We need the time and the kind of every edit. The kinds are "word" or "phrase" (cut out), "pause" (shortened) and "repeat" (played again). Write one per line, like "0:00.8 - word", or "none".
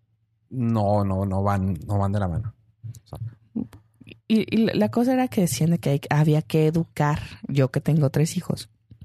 none